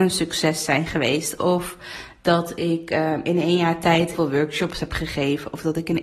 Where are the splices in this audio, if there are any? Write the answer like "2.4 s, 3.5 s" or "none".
4.1 s